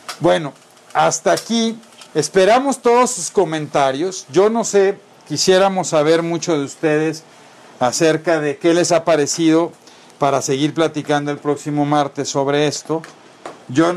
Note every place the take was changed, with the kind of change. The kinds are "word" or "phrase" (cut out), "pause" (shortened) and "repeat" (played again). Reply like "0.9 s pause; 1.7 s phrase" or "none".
2.1 s pause